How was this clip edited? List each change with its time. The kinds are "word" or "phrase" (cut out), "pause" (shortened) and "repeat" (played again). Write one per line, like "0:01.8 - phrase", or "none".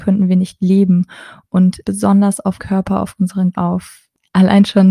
0:01.8 - phrase
0:02.6 - word
0:03.5 - word